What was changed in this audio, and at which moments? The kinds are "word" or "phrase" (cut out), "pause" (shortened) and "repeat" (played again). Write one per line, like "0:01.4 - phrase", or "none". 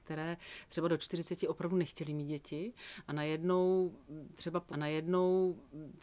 0:04.7 - repeat